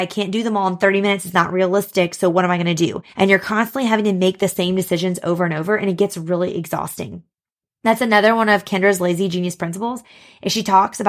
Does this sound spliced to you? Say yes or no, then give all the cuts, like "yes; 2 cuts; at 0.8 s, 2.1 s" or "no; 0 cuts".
yes; 1 cut; at 3.1 s